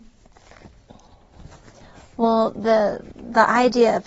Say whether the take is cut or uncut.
uncut